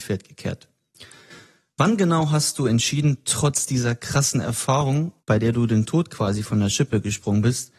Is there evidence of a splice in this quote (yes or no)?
yes